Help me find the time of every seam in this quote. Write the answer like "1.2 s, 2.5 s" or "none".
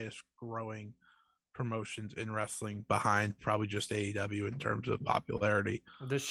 none